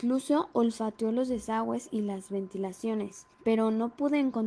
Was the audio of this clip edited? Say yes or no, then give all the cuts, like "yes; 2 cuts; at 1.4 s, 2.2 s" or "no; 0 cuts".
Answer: yes; 1 cut; at 3.3 s